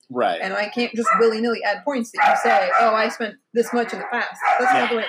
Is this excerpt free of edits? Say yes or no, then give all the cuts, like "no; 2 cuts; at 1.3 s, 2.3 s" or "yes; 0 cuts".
yes; 0 cuts